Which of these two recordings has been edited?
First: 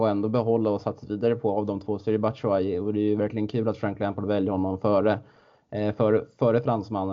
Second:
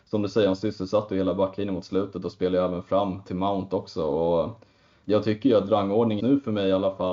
second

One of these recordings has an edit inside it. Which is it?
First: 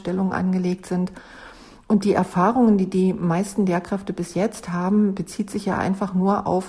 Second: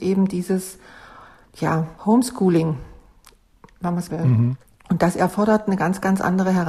second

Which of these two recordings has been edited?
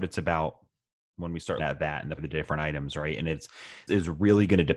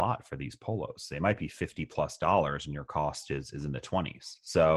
first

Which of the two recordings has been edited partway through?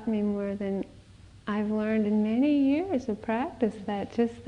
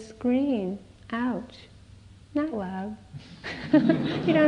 second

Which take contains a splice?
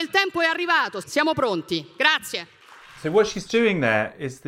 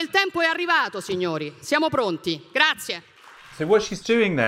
first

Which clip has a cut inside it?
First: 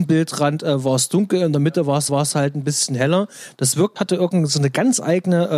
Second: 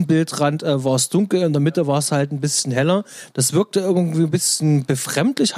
first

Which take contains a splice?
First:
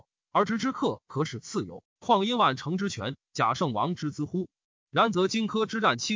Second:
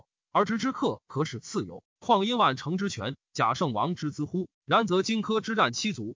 second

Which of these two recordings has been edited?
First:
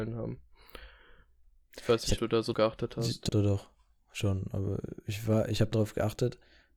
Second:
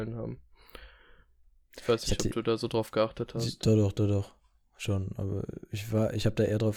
first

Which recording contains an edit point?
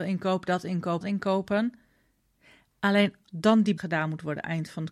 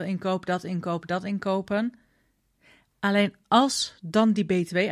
first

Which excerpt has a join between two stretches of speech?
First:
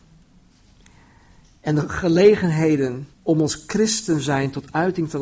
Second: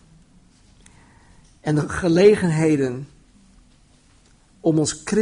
first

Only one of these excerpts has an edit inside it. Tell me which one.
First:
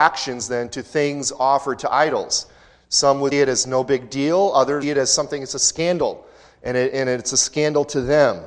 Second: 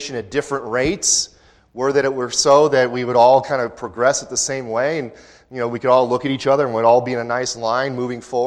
first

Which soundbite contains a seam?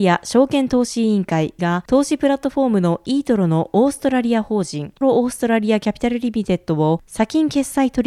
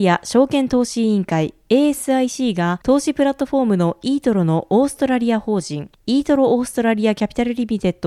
first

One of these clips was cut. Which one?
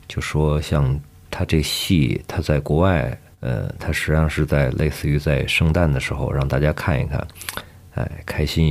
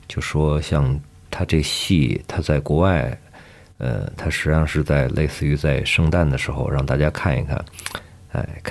first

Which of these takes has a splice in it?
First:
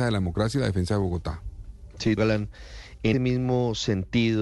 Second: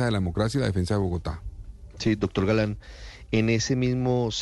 first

